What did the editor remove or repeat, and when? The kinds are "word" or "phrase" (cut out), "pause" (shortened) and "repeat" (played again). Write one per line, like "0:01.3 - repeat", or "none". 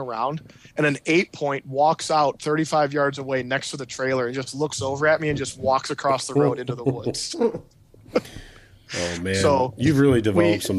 none